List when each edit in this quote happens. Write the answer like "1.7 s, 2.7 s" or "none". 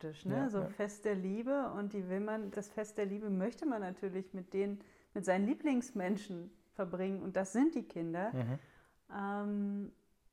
2.5 s